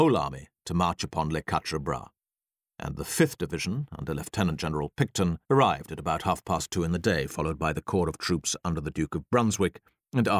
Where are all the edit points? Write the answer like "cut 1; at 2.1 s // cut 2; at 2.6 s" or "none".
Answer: cut 1; at 5.4 s